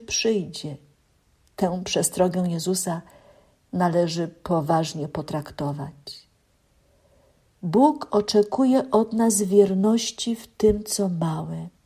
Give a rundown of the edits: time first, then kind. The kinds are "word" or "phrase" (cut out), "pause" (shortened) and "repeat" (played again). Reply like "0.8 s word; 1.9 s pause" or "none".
none